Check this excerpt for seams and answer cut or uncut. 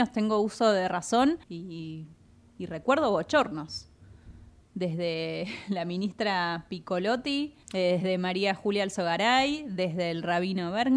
cut